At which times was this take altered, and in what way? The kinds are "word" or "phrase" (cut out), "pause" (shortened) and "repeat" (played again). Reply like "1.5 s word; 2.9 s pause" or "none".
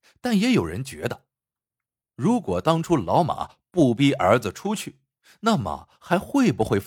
none